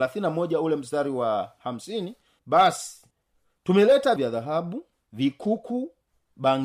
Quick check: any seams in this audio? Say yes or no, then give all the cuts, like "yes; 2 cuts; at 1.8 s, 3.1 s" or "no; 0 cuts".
yes; 2 cuts; at 2.4 s, 4.2 s